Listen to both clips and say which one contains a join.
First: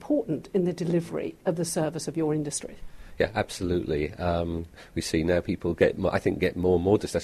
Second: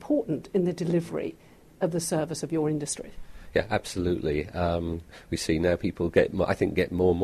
first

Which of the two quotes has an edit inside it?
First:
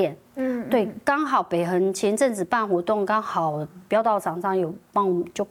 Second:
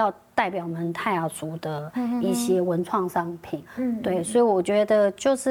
second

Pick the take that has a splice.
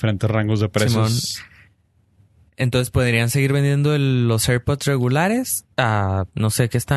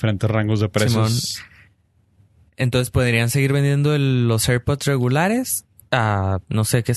first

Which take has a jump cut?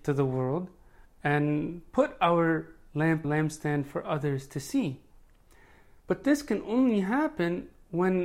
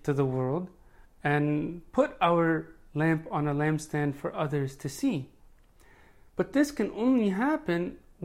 first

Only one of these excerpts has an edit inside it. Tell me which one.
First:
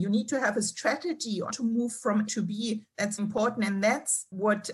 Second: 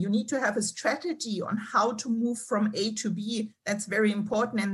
first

